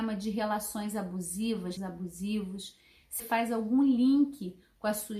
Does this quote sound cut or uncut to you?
cut